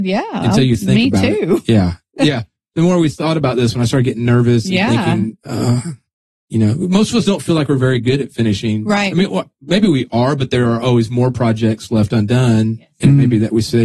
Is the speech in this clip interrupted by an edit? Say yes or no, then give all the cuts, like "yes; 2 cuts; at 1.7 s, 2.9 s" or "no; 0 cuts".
no; 0 cuts